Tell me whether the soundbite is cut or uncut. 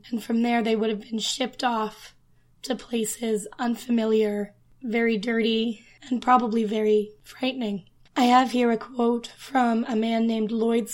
uncut